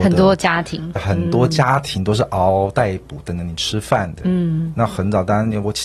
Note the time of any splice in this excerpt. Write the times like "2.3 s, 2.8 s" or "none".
1.0 s

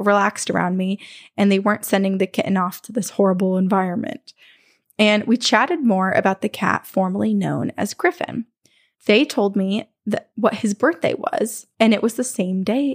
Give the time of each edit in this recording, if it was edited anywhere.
none

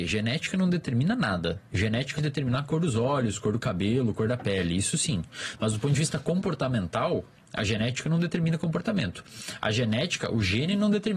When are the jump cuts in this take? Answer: 2.2 s

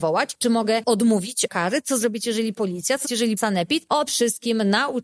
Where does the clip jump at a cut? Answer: 1.5 s, 2.5 s, 3.0 s, 3.4 s, 4.1 s

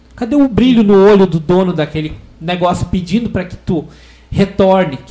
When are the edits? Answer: none

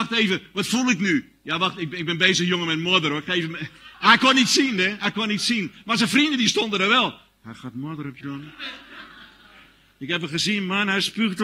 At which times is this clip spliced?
3.9 s, 8.2 s

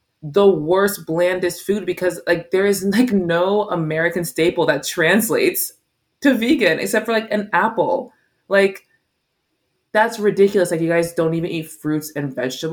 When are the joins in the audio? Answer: none

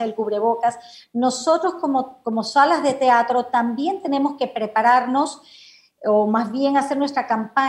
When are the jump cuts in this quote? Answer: none

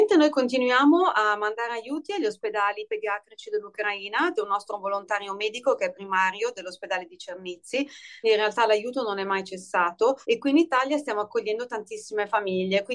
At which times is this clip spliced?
4.3 s, 8.2 s, 10.2 s

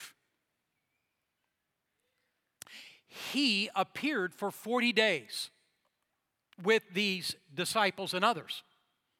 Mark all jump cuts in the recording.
none

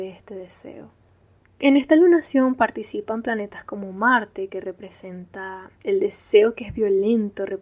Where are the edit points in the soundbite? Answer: none

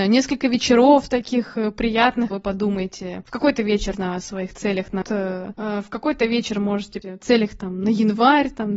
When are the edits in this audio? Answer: 2.3 s, 3.9 s, 5.0 s, 7.0 s

